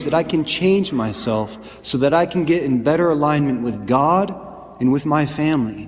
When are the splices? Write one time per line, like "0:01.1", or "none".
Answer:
none

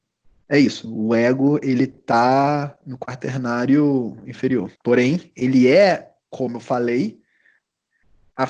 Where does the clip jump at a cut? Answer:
0:04.8
0:06.2

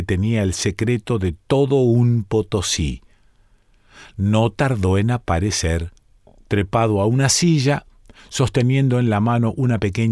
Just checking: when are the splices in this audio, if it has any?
none

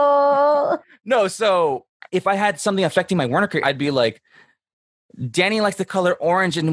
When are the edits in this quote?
0:02.0
0:03.6

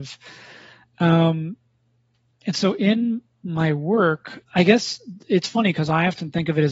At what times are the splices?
0:04.5

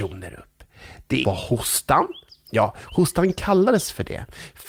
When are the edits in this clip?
0:01.2

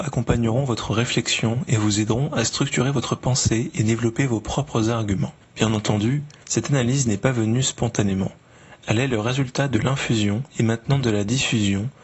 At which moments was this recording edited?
0:05.4
0:10.5

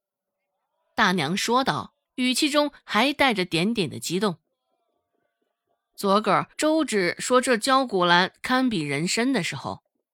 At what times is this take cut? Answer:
0:02.0
0:06.5

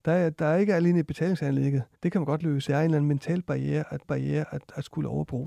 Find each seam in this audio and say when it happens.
0:01.9
0:02.7
0:04.0

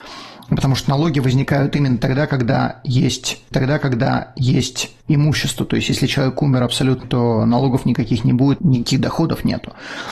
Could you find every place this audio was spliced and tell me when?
0:03.5
0:07.0
0:08.6

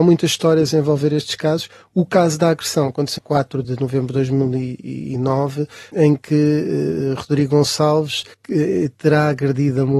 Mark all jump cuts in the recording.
0:03.2
0:03.6
0:05.9
0:08.3

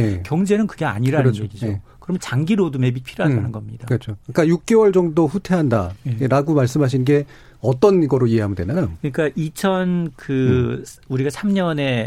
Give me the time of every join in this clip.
none

